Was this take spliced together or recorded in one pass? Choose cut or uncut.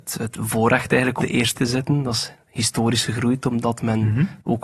cut